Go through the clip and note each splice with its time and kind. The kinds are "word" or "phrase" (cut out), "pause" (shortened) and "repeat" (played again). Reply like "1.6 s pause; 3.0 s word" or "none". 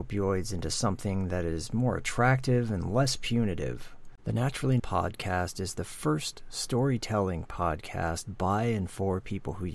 4.2 s pause; 4.8 s word